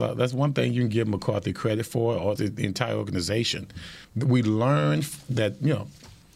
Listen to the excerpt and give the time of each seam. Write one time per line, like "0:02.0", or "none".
0:02.4
0:04.0